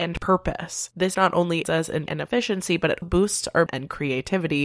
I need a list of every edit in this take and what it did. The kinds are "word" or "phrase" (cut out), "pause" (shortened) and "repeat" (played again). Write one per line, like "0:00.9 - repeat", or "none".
0:01.1 - word
0:01.6 - word
0:02.1 - word
0:03.0 - word
0:03.7 - word